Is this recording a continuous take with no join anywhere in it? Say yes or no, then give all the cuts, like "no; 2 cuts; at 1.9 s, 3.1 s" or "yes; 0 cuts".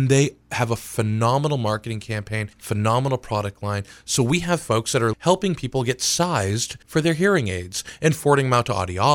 no; 3 cuts; at 2.5 s, 5.1 s, 6.8 s